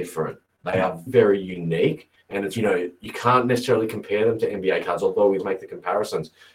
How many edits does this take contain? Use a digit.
4